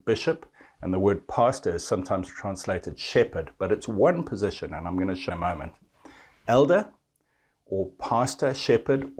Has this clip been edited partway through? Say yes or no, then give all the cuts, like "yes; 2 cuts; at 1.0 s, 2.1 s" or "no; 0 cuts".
yes; 1 cut; at 5.3 s